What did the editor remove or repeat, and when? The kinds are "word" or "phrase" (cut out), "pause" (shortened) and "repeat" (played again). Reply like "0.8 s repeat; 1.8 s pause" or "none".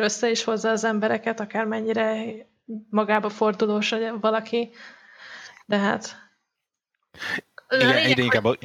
none